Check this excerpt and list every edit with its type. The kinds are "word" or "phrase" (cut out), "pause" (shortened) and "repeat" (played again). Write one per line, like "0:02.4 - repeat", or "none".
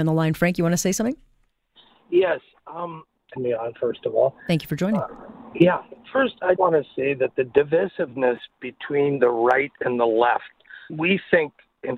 0:03.4 - phrase
0:06.0 - pause
0:06.6 - word
0:10.9 - word